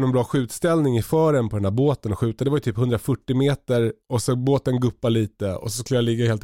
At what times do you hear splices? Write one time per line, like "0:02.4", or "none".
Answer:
0:04.0